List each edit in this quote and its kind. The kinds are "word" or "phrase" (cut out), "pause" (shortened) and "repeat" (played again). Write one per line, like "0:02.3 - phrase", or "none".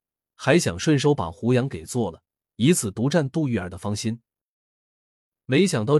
none

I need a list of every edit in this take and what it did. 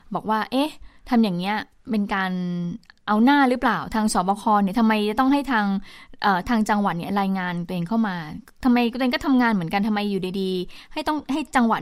none

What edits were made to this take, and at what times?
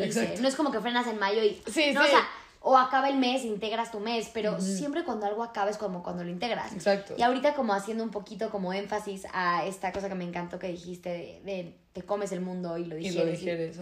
0:01.6 - word

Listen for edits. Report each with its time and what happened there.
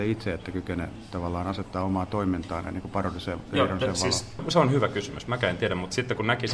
none

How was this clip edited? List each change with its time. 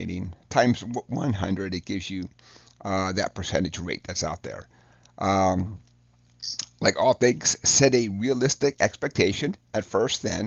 none

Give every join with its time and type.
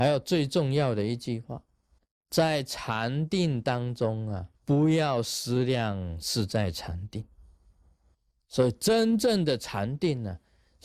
0:02.0 - pause
0:04.5 - pause
0:08.1 - pause

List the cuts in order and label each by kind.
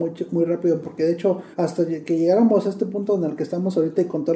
0:01.5 - pause

